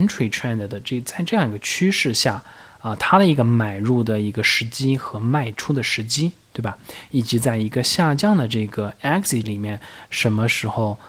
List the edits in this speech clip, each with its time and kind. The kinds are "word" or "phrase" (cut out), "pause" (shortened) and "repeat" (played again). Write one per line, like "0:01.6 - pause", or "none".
0:09.4 - word

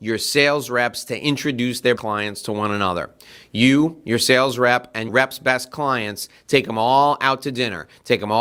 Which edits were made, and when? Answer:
0:02.0 - word
0:05.1 - word

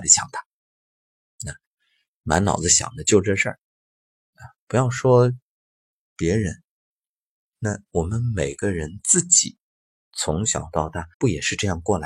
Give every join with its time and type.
0:11.1 - pause

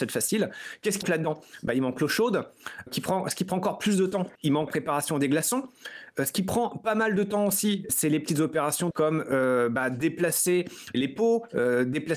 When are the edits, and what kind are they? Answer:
0:01.0 - word
0:02.9 - word
0:04.4 - pause
0:04.7 - word
0:07.9 - word
0:08.9 - phrase
0:10.9 - word

